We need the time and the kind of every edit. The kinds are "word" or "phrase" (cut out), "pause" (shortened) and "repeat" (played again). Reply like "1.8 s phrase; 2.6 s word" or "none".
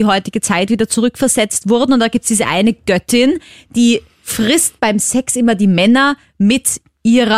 none